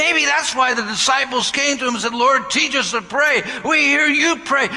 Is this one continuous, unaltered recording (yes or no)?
yes